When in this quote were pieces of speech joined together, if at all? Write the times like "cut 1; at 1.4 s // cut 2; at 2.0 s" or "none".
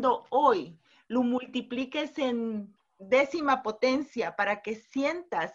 none